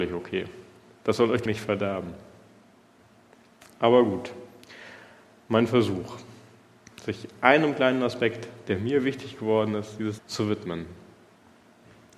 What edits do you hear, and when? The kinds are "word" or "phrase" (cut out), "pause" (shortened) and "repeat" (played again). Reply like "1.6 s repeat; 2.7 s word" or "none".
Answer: 1.5 s word; 10.2 s word